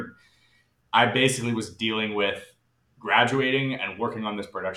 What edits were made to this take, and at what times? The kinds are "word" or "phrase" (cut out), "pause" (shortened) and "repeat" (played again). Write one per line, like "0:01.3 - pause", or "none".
none

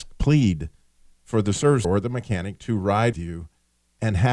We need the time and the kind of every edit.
0:01.8 - word
0:03.1 - word

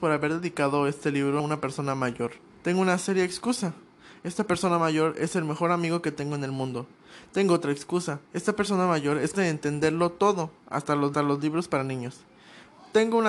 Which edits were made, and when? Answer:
0:01.4 - word
0:02.5 - pause
0:08.2 - pause
0:09.3 - word
0:11.1 - repeat

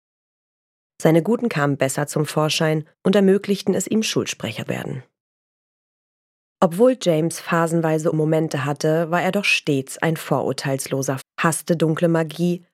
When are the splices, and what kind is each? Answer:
0:01.5 - word
0:02.9 - pause
0:04.7 - word
0:08.1 - word
0:11.2 - word

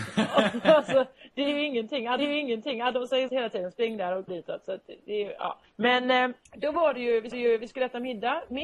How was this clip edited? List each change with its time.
0:02.2 - repeat
0:03.3 - word
0:04.3 - word
0:05.6 - pause
0:06.5 - pause
0:07.3 - repeat

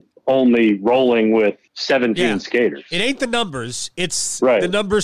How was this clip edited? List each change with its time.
0:01.7 - pause

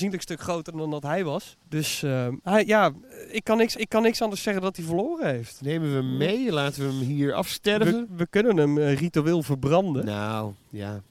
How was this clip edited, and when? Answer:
0:01.6 - pause
0:03.7 - repeat

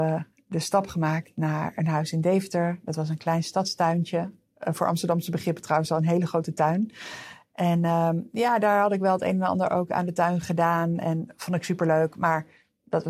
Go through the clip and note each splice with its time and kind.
none

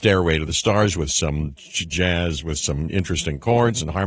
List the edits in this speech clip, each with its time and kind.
none

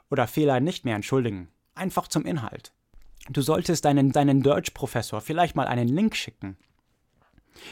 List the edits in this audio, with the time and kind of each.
0:04.1 - repeat

